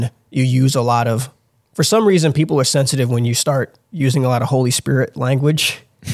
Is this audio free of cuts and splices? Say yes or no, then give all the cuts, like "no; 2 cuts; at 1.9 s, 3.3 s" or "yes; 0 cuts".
yes; 0 cuts